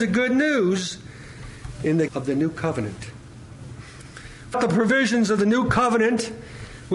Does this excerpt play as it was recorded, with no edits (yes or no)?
no